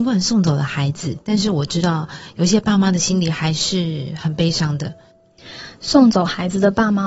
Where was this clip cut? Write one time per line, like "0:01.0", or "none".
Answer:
0:01.2